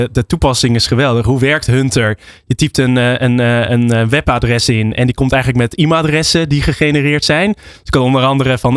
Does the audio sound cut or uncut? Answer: uncut